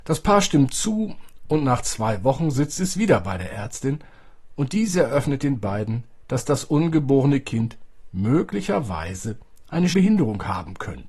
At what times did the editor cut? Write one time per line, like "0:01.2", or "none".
0:09.9